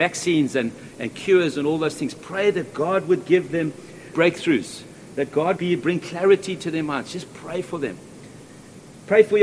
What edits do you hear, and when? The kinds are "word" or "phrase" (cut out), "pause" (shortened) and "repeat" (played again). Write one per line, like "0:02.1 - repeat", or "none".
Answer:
0:04.1 - word
0:05.6 - word